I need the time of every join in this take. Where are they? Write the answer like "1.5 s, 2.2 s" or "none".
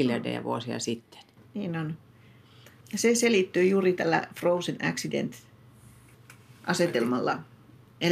none